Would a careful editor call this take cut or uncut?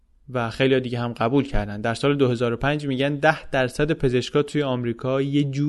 uncut